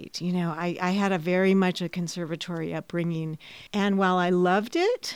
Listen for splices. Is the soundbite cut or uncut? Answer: cut